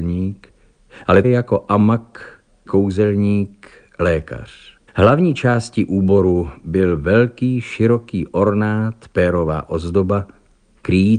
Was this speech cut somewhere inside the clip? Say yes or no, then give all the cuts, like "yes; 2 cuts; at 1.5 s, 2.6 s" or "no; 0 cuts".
yes; 3 cuts; at 1.2 s, 2.7 s, 4.9 s